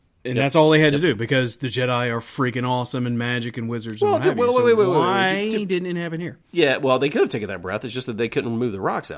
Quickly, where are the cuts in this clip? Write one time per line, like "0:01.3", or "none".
0:06.4